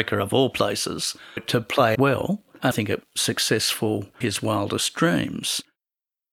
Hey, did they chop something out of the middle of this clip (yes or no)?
yes